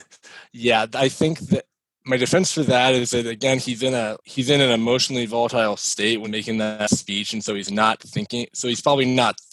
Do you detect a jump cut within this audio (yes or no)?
yes